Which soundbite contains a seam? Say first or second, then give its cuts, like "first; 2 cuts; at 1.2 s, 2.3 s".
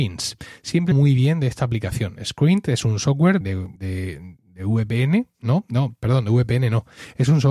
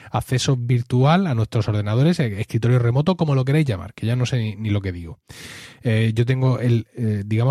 first; 3 cuts; at 0.9 s, 3.4 s, 3.8 s